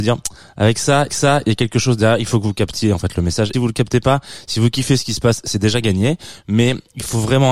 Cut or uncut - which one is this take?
cut